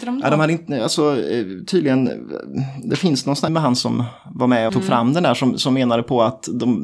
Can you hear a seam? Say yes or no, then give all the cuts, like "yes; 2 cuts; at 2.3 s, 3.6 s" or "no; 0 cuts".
yes; 2 cuts; at 3.5 s, 4.7 s